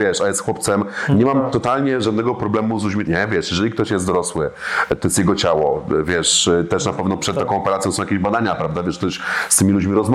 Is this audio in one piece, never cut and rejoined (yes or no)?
no